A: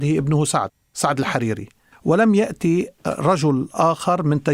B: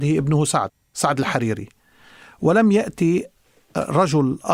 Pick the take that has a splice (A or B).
A